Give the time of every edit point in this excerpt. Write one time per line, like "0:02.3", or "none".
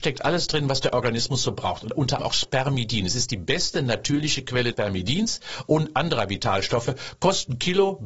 0:02.2
0:04.7

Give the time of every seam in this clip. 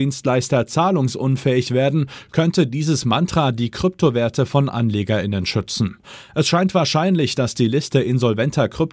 none

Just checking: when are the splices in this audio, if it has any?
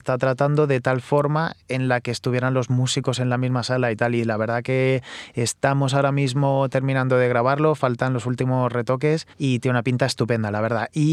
0:01.6
0:09.3

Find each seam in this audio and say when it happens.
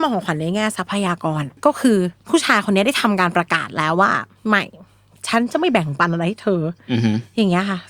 0:01.6

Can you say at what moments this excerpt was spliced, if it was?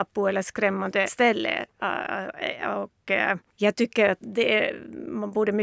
0:01.1
0:03.5
0:04.2

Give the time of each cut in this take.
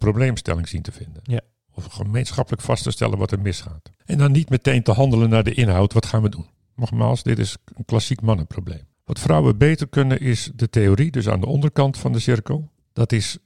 none

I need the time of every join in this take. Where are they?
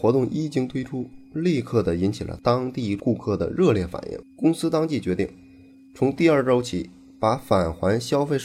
none

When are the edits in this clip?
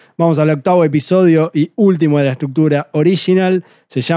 none

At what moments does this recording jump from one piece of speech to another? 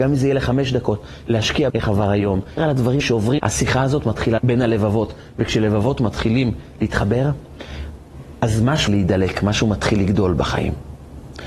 0:01.7
0:02.6
0:03.0
0:03.4
0:04.4
0:08.9

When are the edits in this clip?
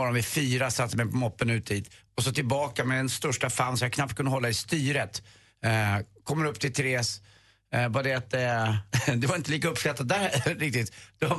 none

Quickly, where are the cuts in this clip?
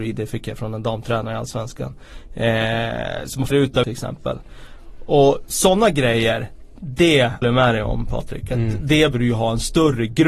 0:03.5
0:03.8
0:07.4
0:09.1

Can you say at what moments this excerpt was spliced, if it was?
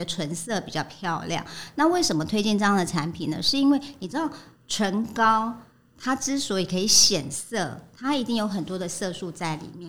none

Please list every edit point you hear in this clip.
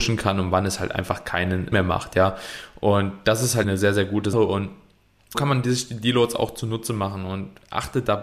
0:01.7
0:03.6
0:04.3
0:05.3

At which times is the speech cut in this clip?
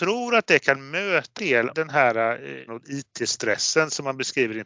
0:01.4
0:01.7
0:02.7

